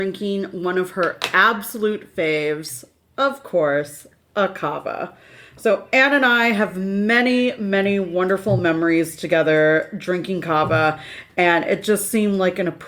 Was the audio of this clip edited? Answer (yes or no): no